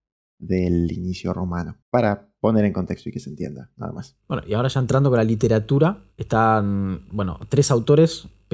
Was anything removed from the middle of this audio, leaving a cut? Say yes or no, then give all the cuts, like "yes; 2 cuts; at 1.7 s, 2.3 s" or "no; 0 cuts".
yes; 3 cuts; at 1.8 s, 4.2 s, 6.1 s